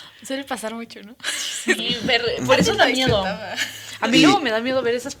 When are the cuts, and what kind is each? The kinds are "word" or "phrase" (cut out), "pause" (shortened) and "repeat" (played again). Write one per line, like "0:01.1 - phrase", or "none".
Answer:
0:01.8 - word